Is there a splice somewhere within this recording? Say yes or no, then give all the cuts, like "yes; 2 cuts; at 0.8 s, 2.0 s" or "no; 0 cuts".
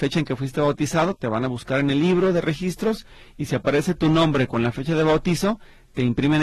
no; 0 cuts